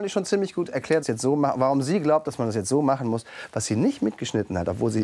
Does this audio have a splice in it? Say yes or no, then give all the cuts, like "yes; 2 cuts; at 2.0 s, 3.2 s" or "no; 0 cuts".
yes; 1 cut; at 1.0 s